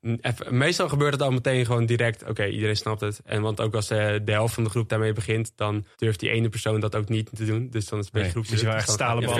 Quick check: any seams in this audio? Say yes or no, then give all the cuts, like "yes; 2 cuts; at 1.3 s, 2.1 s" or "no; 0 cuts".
yes; 1 cut; at 5.9 s